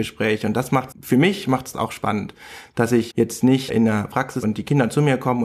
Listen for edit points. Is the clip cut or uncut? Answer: cut